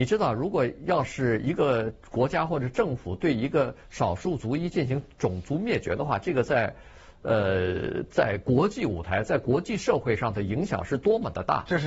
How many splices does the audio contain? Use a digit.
0